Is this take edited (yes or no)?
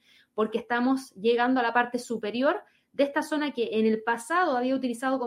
no